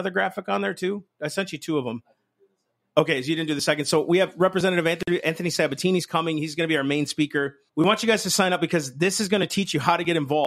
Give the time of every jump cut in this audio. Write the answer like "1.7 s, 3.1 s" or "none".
7.7 s